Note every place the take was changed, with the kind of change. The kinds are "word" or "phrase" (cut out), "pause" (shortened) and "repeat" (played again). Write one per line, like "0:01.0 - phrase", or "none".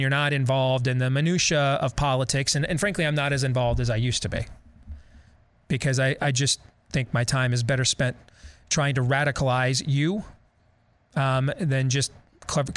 none